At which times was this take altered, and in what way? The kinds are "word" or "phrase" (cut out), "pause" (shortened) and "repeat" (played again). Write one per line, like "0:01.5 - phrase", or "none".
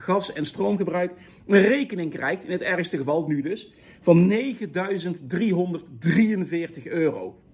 none